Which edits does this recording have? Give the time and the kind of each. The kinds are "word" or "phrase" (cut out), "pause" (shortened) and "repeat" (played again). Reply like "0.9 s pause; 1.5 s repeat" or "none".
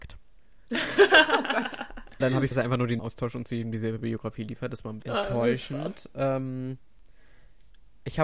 2.2 s word; 2.5 s word; 3.0 s word; 5.0 s word

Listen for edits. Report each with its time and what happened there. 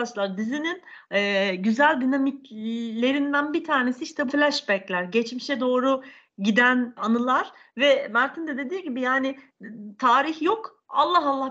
4.3 s word; 7.0 s word

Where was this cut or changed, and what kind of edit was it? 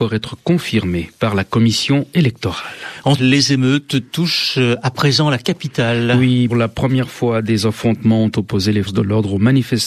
3.2 s word; 6.5 s word; 8.9 s word

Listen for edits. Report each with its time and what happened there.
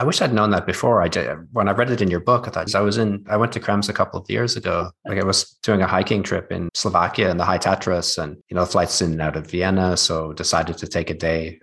2.7 s word; 6.7 s word; 8.4 s pause

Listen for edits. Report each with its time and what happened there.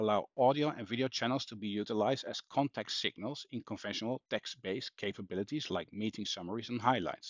4.2 s pause

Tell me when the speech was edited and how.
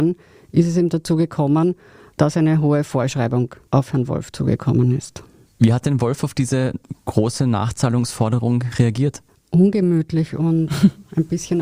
none

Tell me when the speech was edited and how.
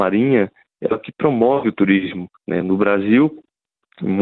2.4 s pause

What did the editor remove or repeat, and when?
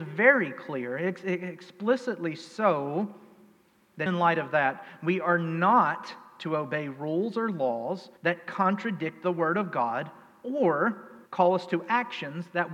4.1 s word; 8.2 s pause; 11.3 s pause

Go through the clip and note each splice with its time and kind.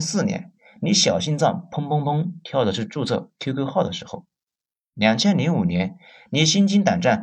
none

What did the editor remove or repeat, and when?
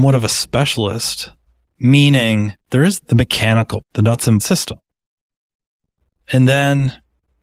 2.6 s pause; 3.0 s word; 3.8 s word; 4.4 s phrase

